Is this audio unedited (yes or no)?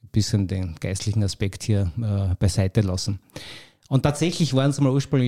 yes